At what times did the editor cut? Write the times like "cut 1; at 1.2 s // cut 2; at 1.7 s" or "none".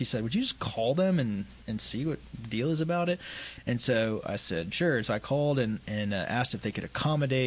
none